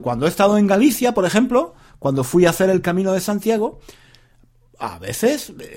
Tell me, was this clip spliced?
no; 0 cuts

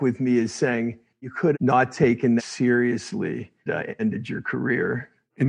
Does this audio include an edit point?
yes; 4 cuts; at 1.5 s, 2.4 s, 3.7 s, 4.0 s

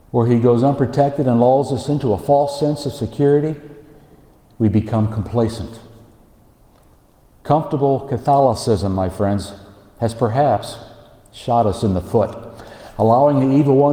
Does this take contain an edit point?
no; 0 cuts

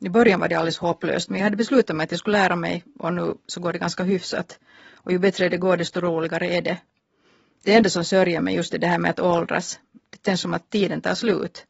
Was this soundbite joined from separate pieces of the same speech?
no; 0 cuts

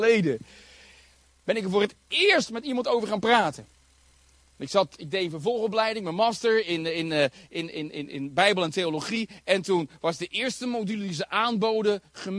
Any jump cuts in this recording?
no; 0 cuts

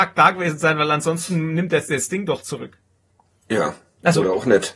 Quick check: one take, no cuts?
yes; 0 cuts

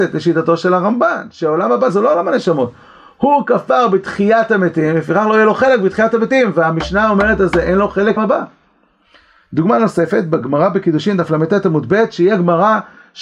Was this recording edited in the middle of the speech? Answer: yes; 1 cut; at 8.2 s

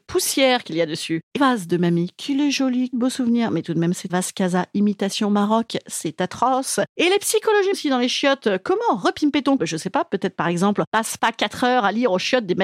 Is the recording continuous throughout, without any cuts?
no; 5 cuts; at 1.4 s, 2.9 s, 4.1 s, 7.7 s, 9.6 s

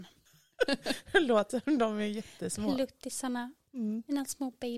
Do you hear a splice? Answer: yes; 1 cut; at 1.5 s

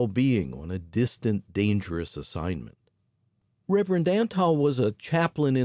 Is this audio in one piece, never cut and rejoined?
yes; 0 cuts

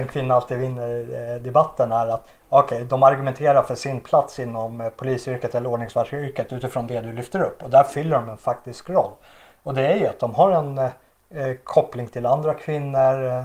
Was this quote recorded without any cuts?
yes; 0 cuts

